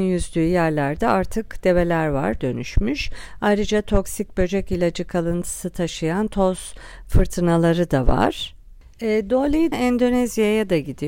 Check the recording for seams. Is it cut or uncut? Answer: cut